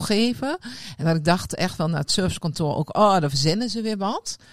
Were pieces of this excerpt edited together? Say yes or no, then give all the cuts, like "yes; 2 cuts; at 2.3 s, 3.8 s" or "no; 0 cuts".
no; 0 cuts